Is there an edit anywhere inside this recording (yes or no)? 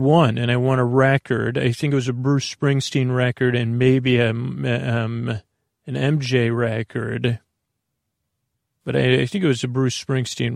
no